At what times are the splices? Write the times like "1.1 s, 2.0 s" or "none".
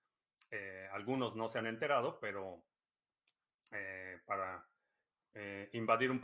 none